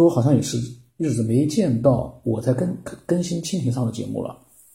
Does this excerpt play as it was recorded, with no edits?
yes; 0 cuts

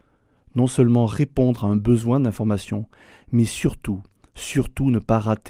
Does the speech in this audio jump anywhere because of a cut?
no; 0 cuts

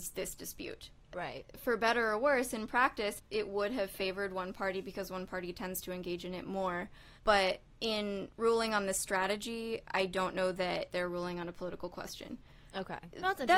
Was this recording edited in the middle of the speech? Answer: yes; 1 cut; at 7.2 s

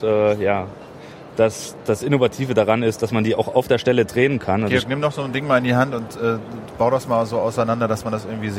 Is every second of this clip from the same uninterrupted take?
yes; 0 cuts

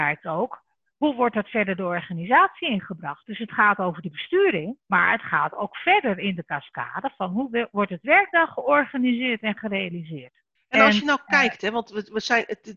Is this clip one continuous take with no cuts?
no; 2 cuts; at 4.8 s, 10.6 s

